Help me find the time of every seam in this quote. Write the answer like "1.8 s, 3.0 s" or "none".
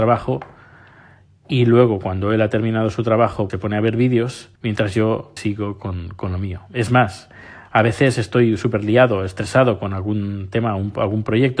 3.5 s, 4.6 s, 5.4 s